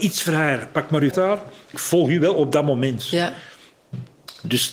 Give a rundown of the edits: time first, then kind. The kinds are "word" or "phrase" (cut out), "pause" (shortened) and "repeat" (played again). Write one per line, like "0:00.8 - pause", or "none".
0:01.1 - word
0:01.7 - word